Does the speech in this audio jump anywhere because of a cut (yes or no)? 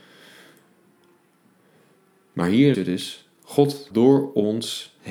yes